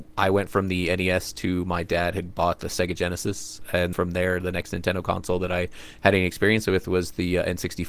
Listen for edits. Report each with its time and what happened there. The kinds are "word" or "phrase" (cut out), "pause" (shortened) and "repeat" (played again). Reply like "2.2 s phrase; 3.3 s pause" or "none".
3.9 s word

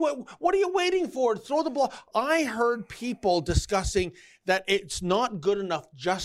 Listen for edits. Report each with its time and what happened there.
none

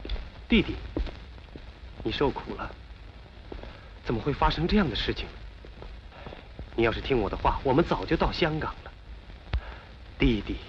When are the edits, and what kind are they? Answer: 2.0 s phrase

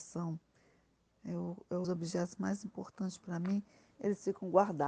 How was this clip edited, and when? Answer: 1.8 s phrase

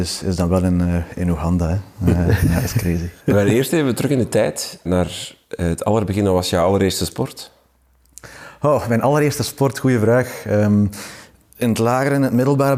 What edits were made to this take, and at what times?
3.2 s pause; 4.8 s word

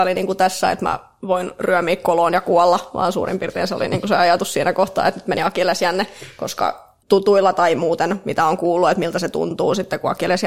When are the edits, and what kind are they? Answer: none

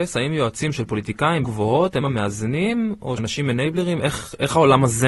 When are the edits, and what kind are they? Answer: 1.4 s word; 2.0 s word; 3.2 s word

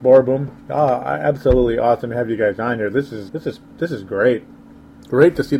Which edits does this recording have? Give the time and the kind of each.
3.3 s word

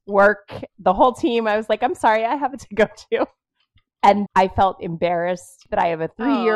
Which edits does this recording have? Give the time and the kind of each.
2.6 s phrase; 4.3 s word

